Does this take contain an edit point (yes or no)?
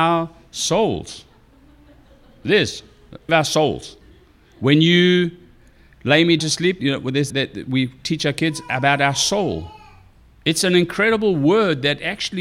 yes